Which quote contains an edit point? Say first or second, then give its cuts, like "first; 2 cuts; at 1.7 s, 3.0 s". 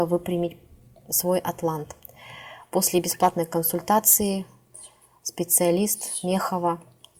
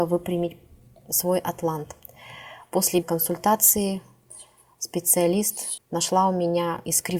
second; 2 cuts; at 3.0 s, 5.8 s